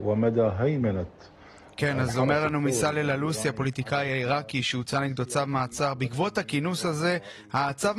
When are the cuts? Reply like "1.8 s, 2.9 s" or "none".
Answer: none